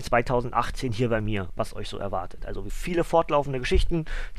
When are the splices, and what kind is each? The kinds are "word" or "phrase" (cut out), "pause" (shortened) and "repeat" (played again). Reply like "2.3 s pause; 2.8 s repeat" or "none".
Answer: 2.7 s word

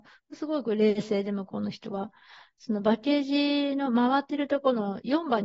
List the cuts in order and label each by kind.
none

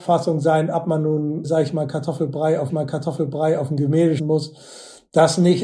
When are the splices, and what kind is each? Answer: 1.4 s word; 2.7 s repeat; 4.2 s word

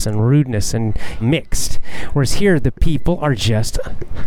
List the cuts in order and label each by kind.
1.2 s phrase

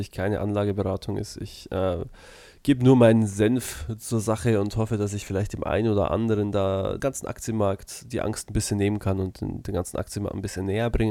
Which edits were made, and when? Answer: 7.0 s word

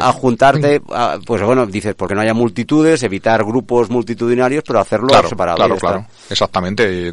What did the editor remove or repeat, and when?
2.1 s word

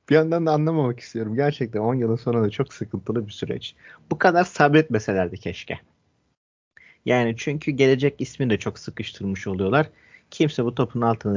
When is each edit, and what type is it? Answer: none

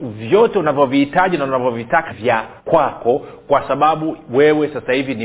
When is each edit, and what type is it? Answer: 2.1 s word; 2.6 s pause

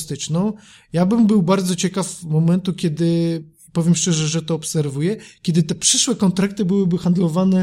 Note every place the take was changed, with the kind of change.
none

